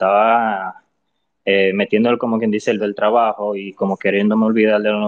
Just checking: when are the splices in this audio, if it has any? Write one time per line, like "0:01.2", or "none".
0:02.8